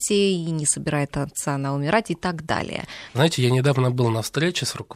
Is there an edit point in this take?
no; 0 cuts

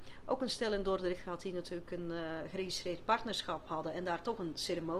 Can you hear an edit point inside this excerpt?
no; 0 cuts

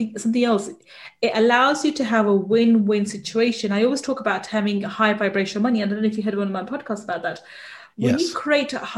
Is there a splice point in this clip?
no; 0 cuts

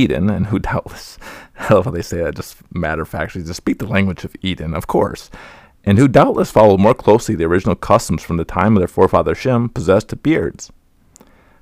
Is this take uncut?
yes; 0 cuts

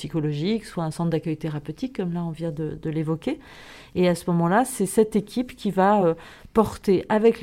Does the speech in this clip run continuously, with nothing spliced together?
yes; 0 cuts

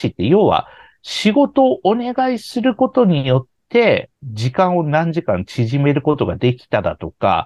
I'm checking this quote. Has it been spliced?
yes; 1 cut; at 4.1 s

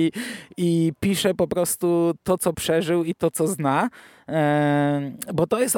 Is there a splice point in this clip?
no; 0 cuts

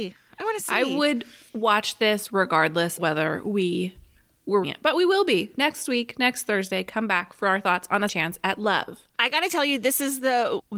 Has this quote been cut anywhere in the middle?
yes; 3 cuts; at 3.0 s, 4.6 s, 8.1 s

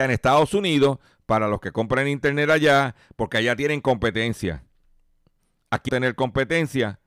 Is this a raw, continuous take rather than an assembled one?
no; 1 cut; at 5.9 s

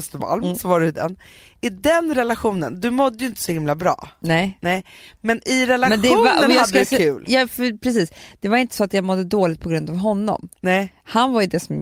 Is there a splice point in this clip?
no; 0 cuts

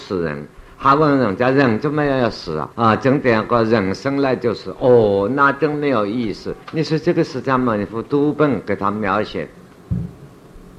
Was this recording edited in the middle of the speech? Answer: yes; 2 cuts; at 2.7 s, 6.6 s

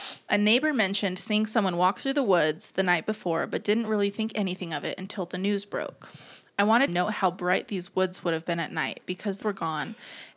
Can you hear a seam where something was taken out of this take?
yes; 2 cuts; at 6.9 s, 9.4 s

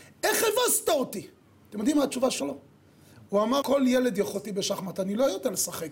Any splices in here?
yes; 3 cuts; at 2.4 s, 3.6 s, 4.3 s

